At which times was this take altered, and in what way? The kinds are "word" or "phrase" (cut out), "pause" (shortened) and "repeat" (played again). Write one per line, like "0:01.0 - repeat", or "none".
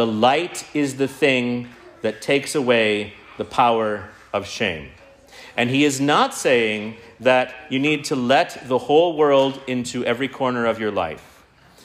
none